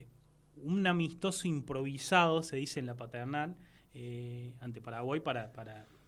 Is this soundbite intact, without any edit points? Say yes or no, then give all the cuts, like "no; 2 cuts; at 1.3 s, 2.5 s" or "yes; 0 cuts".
yes; 0 cuts